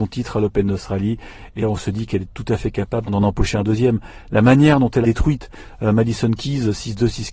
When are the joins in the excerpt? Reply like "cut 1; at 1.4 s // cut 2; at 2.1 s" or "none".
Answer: cut 1; at 1.6 s // cut 2; at 3.1 s // cut 3; at 5.0 s